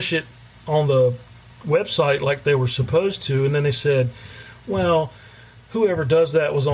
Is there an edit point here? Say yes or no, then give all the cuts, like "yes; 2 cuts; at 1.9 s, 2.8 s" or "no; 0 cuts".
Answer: no; 0 cuts